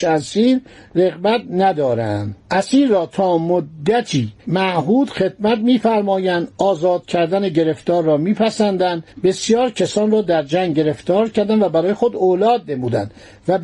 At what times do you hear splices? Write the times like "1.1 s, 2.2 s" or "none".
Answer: 2.4 s, 4.4 s, 9.1 s